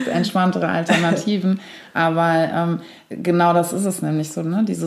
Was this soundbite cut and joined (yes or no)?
no